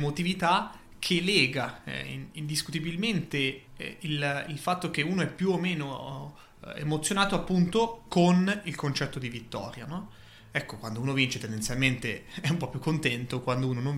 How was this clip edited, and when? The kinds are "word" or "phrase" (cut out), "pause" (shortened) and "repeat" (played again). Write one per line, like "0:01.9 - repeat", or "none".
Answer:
0:03.7 - pause